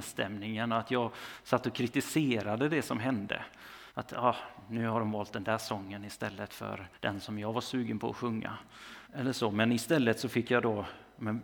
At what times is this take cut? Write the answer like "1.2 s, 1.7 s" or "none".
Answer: 3.9 s, 6.9 s, 9.0 s